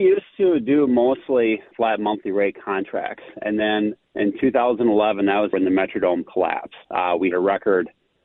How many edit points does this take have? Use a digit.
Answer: 5